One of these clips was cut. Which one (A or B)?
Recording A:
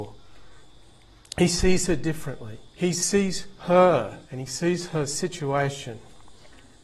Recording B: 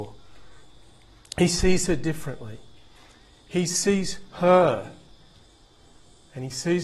A